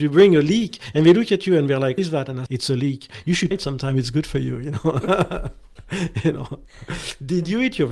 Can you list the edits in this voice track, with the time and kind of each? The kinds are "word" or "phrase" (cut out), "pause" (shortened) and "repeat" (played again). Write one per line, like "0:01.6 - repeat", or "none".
0:02.0 - word
0:02.5 - word
0:03.5 - word